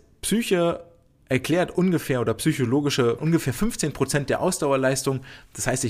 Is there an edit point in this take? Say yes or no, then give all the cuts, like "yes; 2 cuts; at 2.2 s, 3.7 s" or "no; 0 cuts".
yes; 1 cut; at 3.2 s